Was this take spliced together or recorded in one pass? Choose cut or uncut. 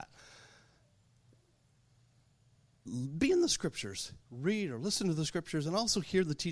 cut